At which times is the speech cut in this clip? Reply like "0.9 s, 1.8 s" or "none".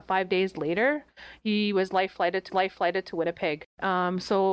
2.5 s